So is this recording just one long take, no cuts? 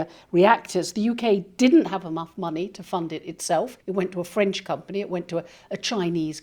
no; 1 cut; at 3.8 s

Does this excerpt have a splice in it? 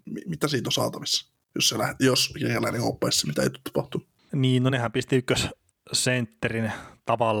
no; 0 cuts

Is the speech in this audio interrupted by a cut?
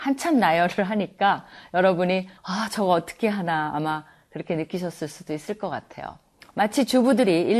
yes; 1 cut; at 2.4 s

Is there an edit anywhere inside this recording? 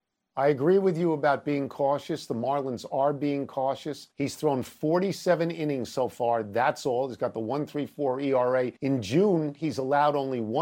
yes; 2 cuts; at 4.1 s, 8.8 s

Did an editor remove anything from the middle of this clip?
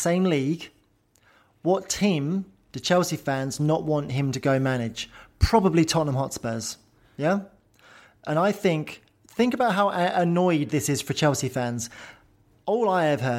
no; 0 cuts

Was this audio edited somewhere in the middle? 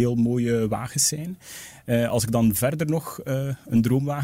no; 0 cuts

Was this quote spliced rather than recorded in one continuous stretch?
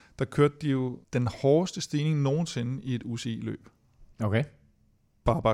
yes; 2 cuts; at 1.0 s, 4.1 s

